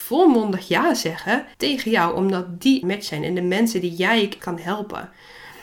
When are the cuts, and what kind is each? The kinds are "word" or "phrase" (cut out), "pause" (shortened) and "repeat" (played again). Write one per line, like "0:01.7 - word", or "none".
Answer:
0:01.5 - pause
0:02.8 - phrase
0:04.4 - word